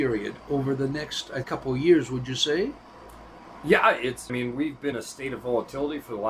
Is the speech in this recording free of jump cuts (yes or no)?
no